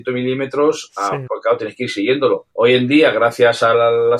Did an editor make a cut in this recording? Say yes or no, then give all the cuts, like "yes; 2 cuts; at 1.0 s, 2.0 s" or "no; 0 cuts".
yes; 1 cut; at 1.3 s